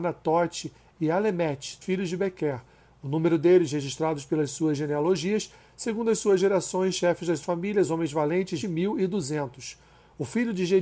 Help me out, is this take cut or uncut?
cut